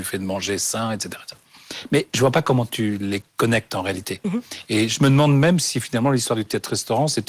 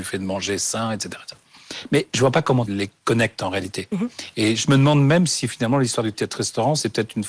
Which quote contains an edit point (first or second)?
second